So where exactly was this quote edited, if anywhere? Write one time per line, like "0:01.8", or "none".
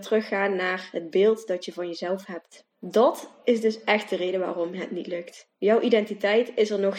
0:02.7
0:05.5